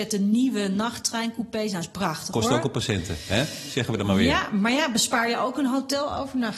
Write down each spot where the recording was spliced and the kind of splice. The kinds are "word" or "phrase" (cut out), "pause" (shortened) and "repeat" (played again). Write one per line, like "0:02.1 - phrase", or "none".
none